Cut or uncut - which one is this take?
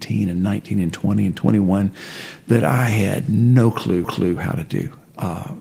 cut